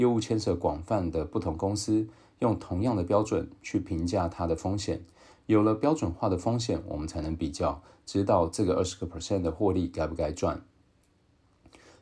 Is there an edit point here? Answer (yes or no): no